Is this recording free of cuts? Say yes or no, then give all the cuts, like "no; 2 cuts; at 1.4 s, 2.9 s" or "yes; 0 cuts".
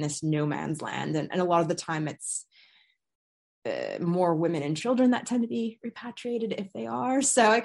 yes; 0 cuts